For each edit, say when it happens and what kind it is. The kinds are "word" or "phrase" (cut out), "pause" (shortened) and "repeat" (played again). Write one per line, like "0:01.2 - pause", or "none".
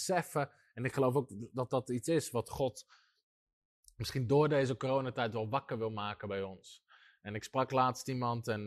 none